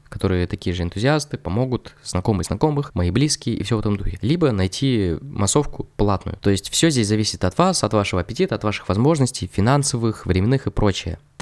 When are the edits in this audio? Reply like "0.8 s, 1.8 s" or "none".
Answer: none